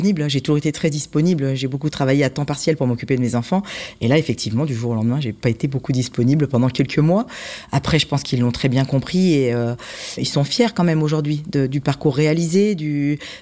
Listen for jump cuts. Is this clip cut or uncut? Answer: cut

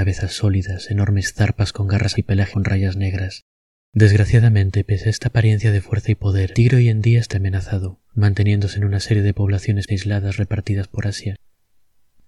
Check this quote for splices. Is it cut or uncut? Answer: cut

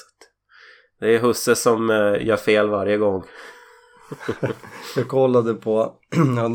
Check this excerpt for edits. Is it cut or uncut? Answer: uncut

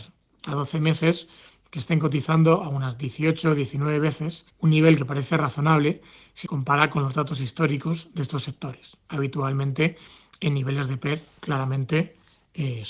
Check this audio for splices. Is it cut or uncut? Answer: cut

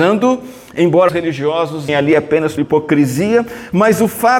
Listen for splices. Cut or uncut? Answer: cut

